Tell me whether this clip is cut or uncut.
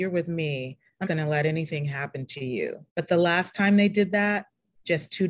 cut